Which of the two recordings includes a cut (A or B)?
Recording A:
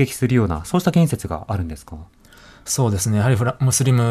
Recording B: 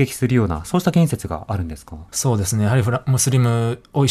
B